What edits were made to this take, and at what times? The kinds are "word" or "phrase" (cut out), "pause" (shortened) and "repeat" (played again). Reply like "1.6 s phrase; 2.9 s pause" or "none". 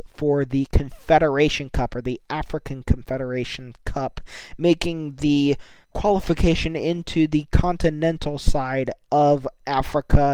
none